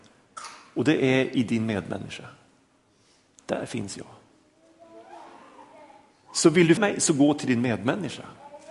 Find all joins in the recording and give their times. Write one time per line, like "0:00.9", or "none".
0:06.8